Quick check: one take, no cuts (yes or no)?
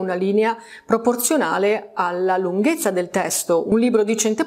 yes